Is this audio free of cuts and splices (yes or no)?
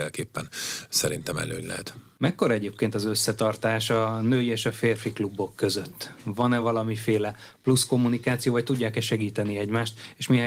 yes